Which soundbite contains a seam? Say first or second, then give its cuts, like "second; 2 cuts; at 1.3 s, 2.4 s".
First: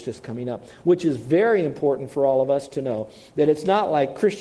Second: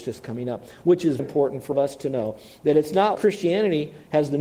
second; 3 cuts; at 1.2 s, 1.7 s, 3.1 s